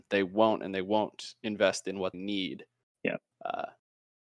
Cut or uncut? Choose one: cut